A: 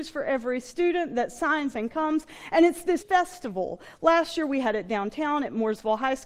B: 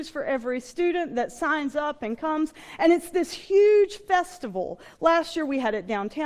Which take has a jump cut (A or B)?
A